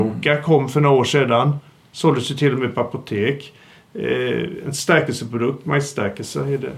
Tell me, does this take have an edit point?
no; 0 cuts

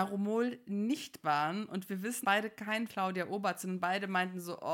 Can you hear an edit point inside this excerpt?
yes; 3 cuts; at 1.2 s, 2.2 s, 2.9 s

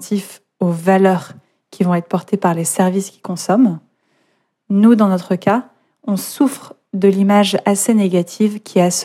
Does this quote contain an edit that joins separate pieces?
no; 0 cuts

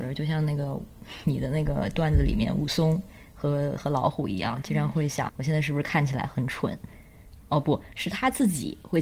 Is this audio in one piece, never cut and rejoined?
no; 1 cut; at 5.3 s

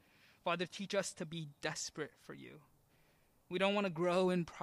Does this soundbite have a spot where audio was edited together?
no; 0 cuts

